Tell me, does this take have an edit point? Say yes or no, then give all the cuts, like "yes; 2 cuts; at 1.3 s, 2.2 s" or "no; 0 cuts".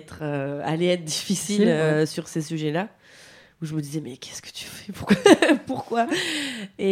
no; 0 cuts